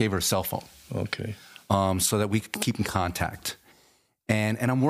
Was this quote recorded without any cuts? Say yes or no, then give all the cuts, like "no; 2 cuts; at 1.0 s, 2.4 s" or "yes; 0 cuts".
yes; 0 cuts